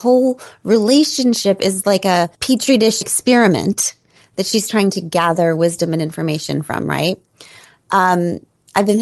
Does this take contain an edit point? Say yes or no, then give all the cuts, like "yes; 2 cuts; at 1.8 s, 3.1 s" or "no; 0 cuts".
yes; 1 cut; at 3.0 s